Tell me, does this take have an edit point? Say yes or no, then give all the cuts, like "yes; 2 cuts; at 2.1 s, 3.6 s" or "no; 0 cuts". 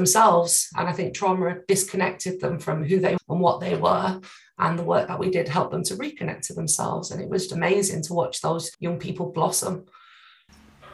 yes; 3 cuts; at 3.2 s, 7.5 s, 8.7 s